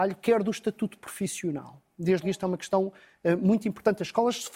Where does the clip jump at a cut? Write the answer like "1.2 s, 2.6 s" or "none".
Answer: 2.2 s

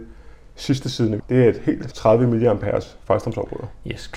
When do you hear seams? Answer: 1.2 s, 1.9 s

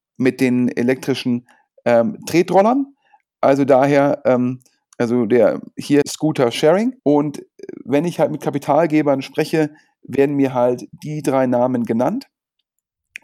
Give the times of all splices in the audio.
6.0 s, 7.0 s

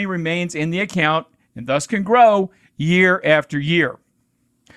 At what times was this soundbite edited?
none

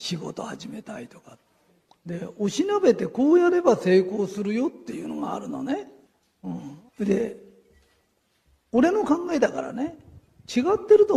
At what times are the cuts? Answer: 1.7 s, 6.1 s, 6.9 s

